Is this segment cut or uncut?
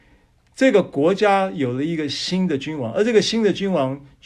uncut